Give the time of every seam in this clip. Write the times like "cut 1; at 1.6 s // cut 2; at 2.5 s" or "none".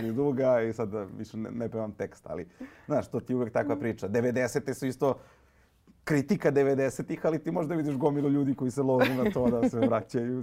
none